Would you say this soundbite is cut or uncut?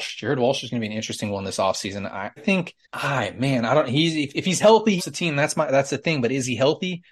cut